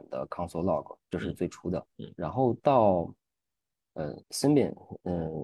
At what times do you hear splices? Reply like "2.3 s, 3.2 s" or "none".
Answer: 1.0 s, 1.9 s, 4.2 s